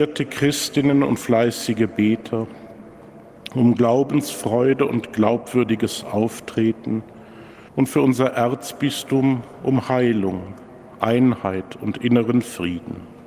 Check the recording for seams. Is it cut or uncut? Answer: cut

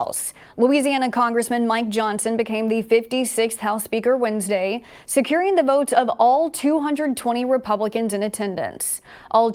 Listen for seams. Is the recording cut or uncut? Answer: uncut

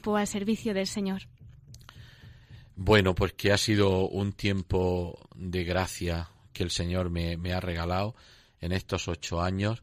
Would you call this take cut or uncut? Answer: uncut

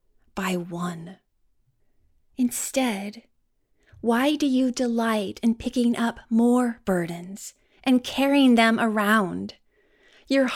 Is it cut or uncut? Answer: cut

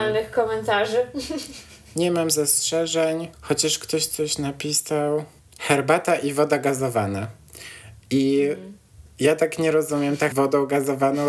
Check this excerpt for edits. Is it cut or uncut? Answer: cut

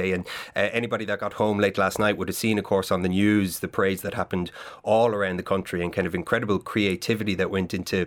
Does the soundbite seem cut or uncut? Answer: uncut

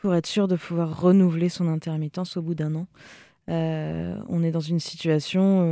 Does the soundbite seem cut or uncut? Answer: uncut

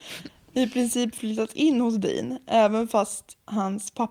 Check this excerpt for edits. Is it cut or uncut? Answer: uncut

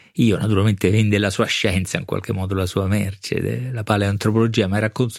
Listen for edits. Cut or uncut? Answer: uncut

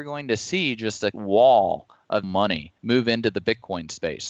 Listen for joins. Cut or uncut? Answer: cut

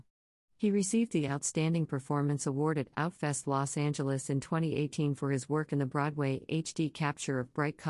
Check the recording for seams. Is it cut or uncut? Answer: uncut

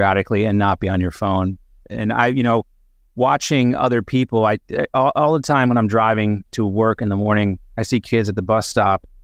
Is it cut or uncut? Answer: uncut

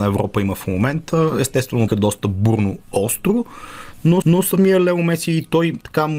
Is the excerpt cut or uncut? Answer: cut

